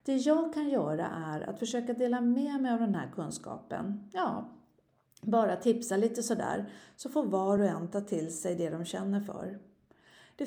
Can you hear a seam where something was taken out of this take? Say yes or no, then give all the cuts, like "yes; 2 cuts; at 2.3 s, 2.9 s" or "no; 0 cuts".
no; 0 cuts